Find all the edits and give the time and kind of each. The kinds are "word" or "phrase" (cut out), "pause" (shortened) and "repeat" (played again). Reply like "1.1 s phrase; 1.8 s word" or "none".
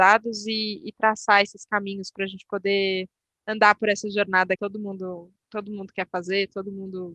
4.6 s word; 5.4 s pause